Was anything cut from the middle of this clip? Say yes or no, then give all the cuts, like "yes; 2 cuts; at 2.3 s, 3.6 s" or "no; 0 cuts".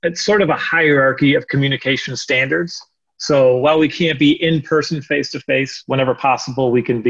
no; 0 cuts